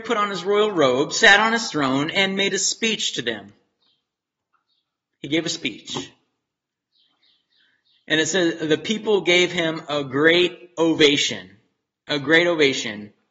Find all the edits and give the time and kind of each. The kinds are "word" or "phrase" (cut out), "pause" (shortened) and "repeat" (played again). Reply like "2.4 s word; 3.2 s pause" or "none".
none

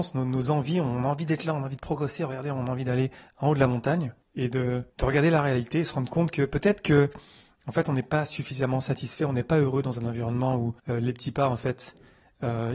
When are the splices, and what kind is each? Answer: 3.1 s pause; 4.2 s pause; 4.9 s pause; 10.8 s pause

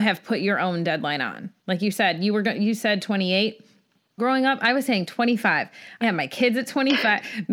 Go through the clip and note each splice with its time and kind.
1.6 s pause; 4.2 s word; 6.0 s phrase

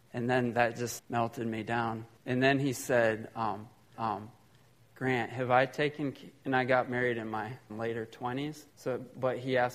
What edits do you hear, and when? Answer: 1.0 s word; 2.2 s pause; 3.9 s repeat; 7.7 s word; 8.7 s pause

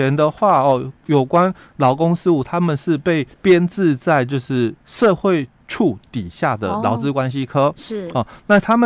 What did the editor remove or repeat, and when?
3.3 s pause; 4.8 s pause

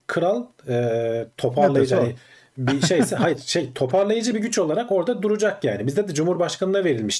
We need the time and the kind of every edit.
none

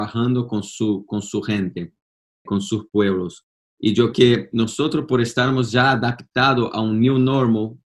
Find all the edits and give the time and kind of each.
2.5 s word; 4.1 s word

